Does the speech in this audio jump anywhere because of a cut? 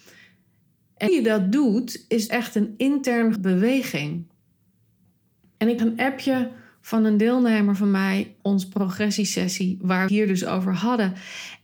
yes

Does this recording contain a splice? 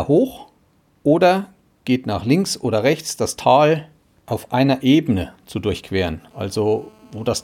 no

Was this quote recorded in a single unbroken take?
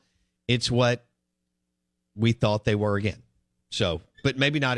yes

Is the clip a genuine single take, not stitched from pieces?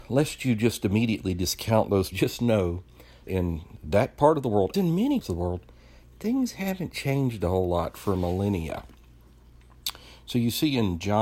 no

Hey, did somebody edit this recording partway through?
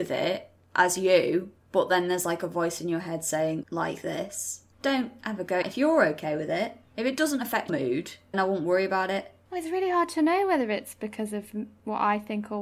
yes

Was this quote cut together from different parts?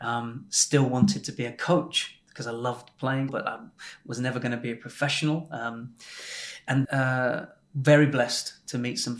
yes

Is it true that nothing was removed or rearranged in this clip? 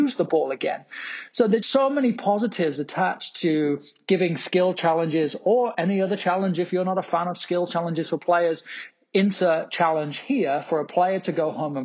no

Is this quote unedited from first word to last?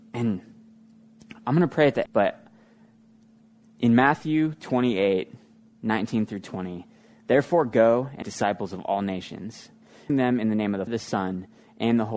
no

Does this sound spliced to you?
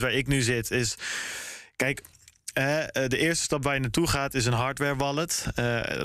no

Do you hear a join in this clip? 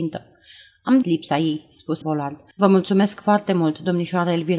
yes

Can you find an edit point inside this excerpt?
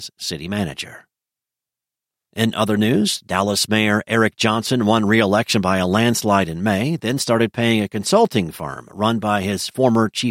no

